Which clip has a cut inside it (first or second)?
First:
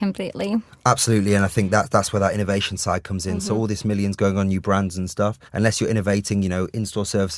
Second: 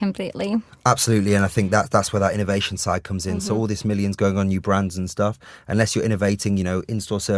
first